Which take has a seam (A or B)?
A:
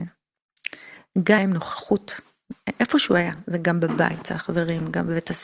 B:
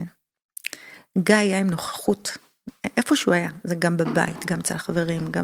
A